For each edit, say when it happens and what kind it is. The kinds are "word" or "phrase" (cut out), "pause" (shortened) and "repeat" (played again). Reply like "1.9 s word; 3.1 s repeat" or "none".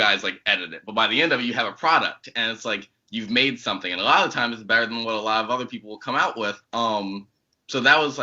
6.6 s pause